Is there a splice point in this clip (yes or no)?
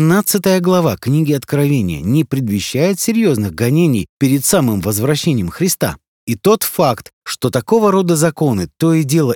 no